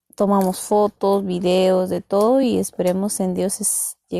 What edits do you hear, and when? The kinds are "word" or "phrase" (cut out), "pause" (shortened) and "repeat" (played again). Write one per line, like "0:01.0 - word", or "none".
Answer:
none